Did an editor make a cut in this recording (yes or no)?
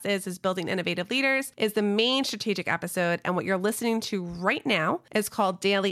no